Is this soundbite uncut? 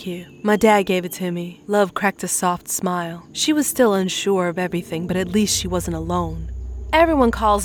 yes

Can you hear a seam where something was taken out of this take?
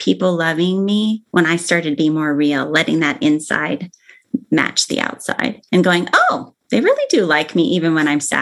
yes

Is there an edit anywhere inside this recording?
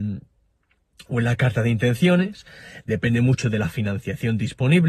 no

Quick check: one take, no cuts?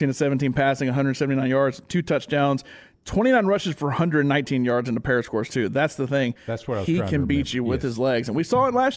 yes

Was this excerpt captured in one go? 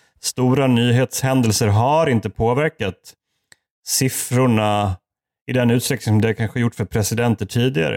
yes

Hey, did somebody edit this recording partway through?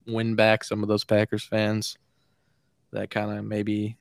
no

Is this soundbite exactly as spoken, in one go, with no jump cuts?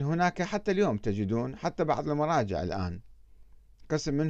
yes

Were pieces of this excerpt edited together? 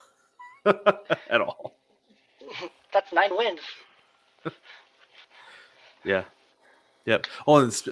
yes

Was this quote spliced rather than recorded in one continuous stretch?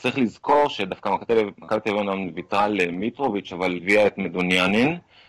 yes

